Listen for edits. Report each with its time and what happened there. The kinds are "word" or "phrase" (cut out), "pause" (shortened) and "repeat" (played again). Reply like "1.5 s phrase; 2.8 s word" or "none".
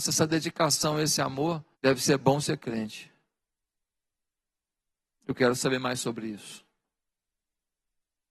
1.7 s pause